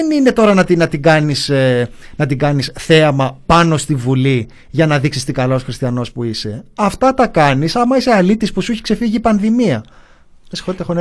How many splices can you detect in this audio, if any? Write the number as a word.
zero